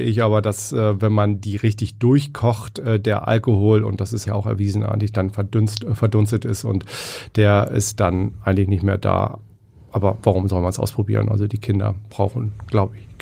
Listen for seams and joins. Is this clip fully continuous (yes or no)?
no